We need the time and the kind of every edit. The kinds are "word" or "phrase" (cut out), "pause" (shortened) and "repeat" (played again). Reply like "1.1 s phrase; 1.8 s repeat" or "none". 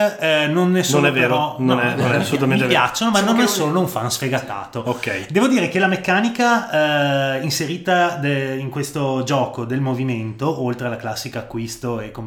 none